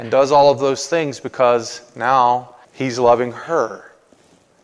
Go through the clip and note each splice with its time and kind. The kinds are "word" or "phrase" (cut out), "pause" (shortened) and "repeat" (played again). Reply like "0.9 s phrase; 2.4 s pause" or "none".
2.6 s pause